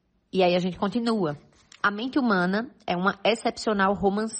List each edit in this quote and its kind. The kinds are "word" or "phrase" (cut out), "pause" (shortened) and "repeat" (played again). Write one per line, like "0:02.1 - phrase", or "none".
none